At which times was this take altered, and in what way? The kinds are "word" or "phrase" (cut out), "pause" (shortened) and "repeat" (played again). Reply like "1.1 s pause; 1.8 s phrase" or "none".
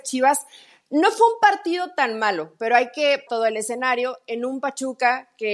3.3 s word